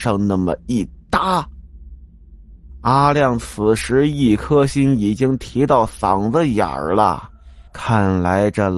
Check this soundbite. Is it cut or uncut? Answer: cut